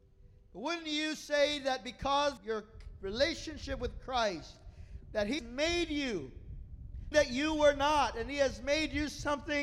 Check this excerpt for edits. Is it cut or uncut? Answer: cut